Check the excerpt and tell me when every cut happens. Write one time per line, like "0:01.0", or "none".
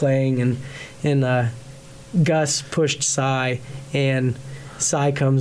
none